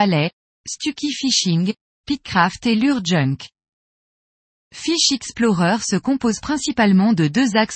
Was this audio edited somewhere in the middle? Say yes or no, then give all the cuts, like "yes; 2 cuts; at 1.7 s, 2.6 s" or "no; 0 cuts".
no; 0 cuts